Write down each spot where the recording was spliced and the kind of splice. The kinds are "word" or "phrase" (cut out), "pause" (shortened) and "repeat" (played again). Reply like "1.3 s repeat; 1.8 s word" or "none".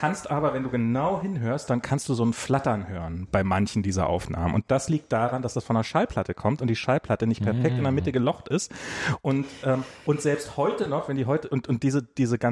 none